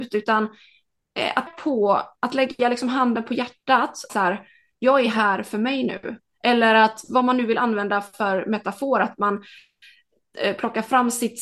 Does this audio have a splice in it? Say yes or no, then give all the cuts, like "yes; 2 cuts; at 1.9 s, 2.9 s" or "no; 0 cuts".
yes; 2 cuts; at 1.5 s, 4.1 s